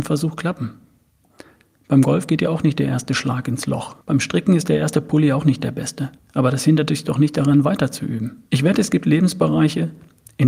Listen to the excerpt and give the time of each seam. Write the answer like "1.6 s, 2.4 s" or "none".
4.0 s, 6.2 s, 8.5 s